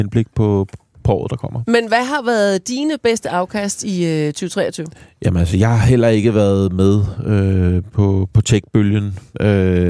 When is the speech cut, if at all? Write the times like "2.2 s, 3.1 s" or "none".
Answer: none